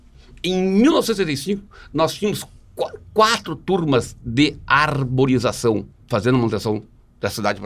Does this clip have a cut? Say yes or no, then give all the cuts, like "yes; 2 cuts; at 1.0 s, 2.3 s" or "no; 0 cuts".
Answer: no; 0 cuts